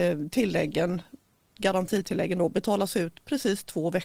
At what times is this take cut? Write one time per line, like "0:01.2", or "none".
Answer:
none

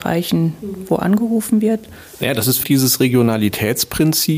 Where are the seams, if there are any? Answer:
0:02.6

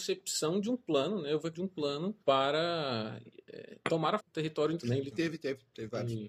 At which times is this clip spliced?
0:01.5
0:02.2
0:04.2
0:04.8
0:05.1

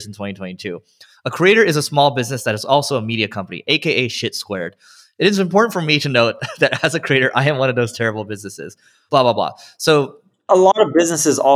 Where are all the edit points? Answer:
none

